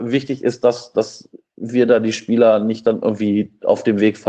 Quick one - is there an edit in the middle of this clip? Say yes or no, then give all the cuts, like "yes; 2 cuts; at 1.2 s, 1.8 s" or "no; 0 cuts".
no; 0 cuts